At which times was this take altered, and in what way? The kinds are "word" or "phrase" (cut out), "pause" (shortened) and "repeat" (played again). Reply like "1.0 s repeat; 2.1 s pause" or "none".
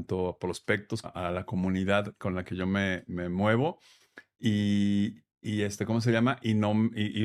1.0 s phrase